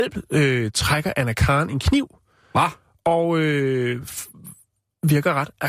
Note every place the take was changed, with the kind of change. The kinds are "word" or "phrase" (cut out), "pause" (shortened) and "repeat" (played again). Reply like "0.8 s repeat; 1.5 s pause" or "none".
none